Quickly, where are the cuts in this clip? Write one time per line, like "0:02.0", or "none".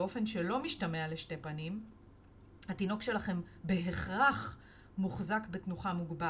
none